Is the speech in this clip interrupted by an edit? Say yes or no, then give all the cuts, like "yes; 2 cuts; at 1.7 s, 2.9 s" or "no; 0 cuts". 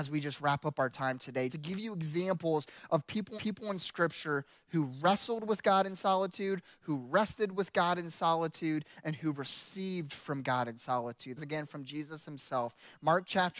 yes; 3 cuts; at 1.5 s, 3.4 s, 11.4 s